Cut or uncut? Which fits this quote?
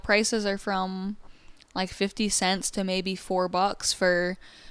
uncut